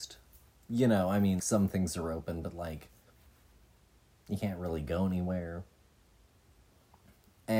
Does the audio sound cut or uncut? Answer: cut